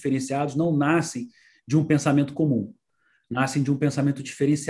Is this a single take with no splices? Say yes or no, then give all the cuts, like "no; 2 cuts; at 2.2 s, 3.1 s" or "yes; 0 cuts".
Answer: yes; 0 cuts